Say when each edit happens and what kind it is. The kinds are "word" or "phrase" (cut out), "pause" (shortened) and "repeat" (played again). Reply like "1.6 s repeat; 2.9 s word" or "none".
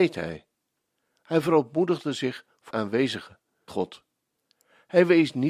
2.7 s word; 3.7 s word